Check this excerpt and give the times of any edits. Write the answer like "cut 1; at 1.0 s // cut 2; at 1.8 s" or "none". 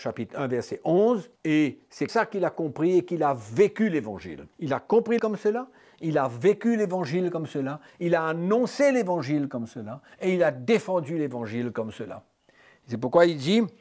cut 1; at 1.4 s // cut 2; at 2.1 s // cut 3; at 4.5 s // cut 4; at 5.2 s